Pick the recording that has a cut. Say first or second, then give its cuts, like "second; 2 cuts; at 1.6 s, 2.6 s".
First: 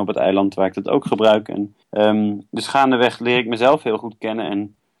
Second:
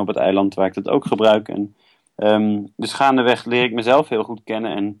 first; 1 cut; at 1.8 s